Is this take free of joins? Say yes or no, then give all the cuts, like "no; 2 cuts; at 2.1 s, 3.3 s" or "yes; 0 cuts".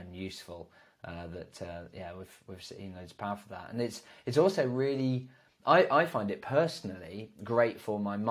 yes; 0 cuts